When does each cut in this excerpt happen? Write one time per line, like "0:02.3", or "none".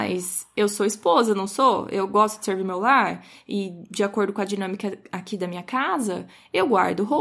none